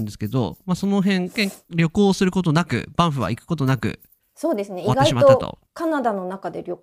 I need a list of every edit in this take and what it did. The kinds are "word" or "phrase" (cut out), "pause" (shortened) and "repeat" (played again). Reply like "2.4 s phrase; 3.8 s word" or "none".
4.2 s pause; 5.7 s pause